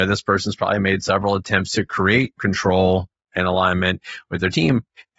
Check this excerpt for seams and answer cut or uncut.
uncut